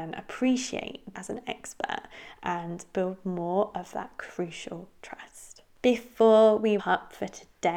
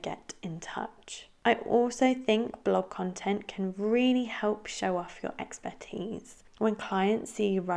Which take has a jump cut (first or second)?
first